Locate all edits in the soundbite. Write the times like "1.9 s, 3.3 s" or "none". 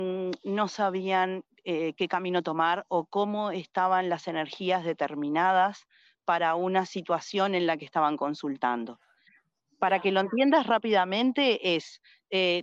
none